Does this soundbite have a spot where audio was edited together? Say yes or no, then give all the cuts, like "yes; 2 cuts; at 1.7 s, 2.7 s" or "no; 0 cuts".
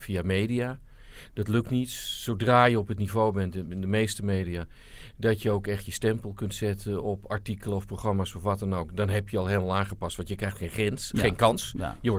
no; 0 cuts